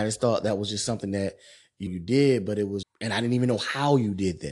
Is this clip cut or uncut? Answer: cut